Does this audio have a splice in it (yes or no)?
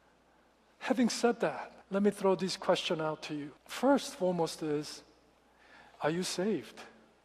yes